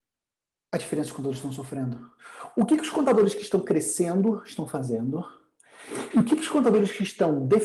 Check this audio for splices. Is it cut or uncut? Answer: uncut